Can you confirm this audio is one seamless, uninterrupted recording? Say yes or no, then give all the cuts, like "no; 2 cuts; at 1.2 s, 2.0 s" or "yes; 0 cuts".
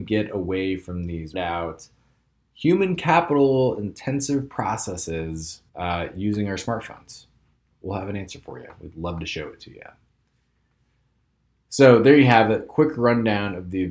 no; 2 cuts; at 1.3 s, 5.7 s